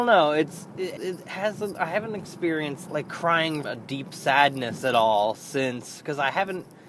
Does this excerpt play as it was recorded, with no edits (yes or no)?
no